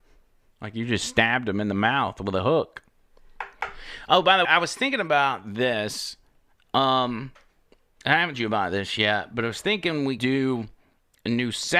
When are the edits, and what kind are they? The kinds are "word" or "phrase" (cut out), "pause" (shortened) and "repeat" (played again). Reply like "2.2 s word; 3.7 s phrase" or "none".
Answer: 4.4 s word; 8.3 s word; 10.2 s word